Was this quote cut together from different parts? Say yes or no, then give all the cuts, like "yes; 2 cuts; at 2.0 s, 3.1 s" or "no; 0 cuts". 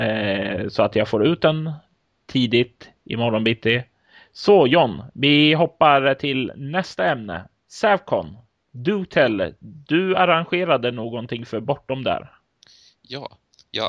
no; 0 cuts